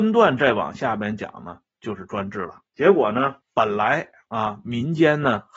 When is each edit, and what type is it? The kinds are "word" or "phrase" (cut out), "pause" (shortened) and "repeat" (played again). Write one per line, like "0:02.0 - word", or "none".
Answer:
0:02.7 - pause
0:03.4 - pause

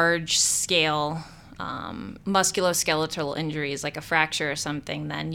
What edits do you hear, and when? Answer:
0:02.2 - pause

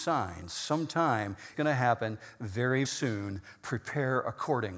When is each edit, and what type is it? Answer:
0:01.5 - word
0:02.8 - word

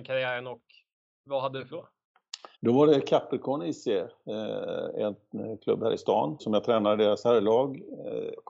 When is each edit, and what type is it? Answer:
0:01.7 - word
0:02.5 - pause
0:06.4 - word

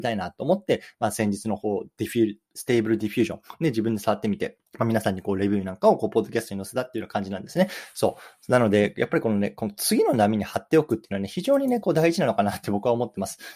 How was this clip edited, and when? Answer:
0:02.5 - pause
0:04.7 - pause

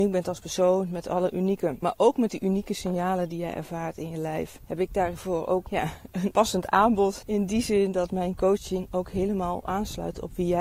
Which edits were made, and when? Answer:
0:01.8 - word

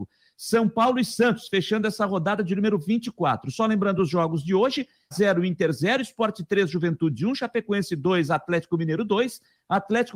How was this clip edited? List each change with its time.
0:05.1 - word

